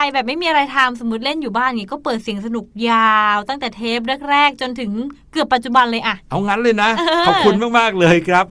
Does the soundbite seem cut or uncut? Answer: uncut